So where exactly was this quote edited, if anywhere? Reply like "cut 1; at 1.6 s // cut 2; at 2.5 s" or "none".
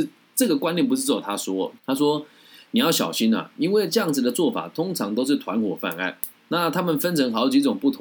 cut 1; at 1.8 s